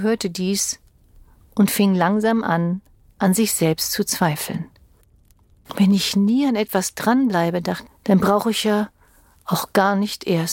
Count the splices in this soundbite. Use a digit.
1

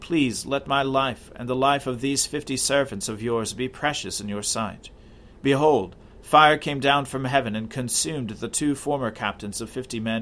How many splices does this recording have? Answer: 1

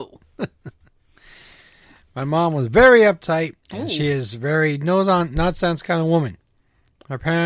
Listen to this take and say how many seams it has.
1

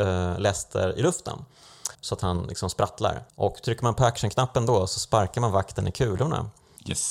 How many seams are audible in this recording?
2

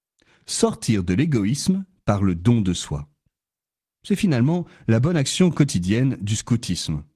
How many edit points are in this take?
0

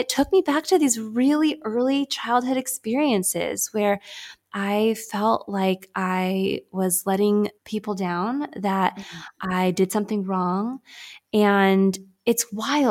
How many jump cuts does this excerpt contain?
1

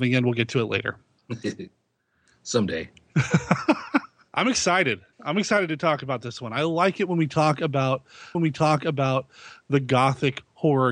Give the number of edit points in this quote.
2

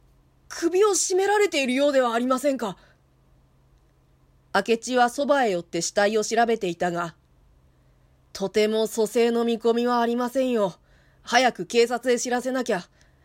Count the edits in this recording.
0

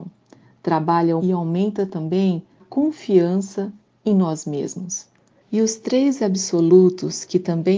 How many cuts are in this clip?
2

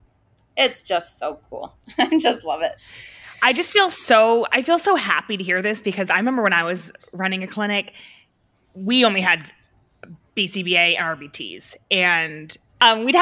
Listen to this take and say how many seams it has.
0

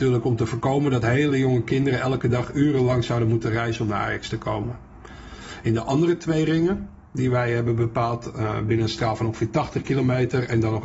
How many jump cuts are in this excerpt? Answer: 0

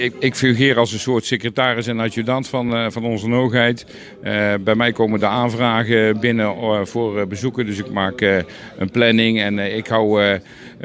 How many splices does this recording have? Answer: 0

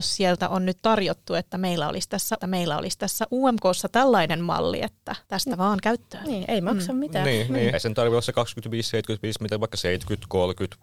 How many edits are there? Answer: 3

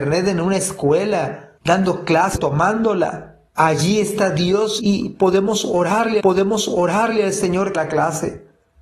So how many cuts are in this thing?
6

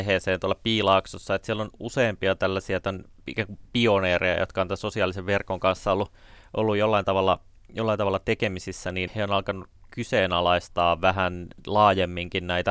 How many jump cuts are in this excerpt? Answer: 1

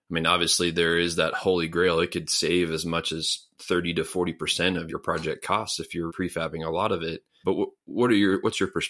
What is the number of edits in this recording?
3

